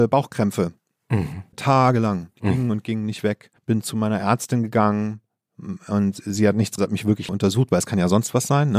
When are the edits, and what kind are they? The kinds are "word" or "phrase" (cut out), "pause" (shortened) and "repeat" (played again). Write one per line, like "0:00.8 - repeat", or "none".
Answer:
0:03.6 - pause
0:06.8 - phrase
0:07.3 - word

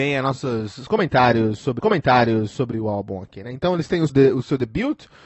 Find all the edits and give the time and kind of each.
0:01.8 - repeat
0:04.1 - word

